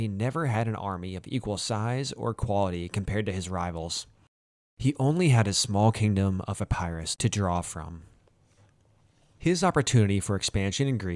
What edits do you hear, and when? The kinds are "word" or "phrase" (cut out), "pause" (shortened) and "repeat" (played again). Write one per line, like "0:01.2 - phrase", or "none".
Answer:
none